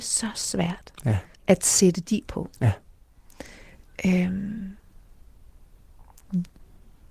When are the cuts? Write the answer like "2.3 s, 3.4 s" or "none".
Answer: 1.3 s, 2.3 s